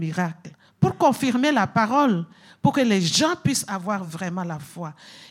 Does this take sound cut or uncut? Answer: uncut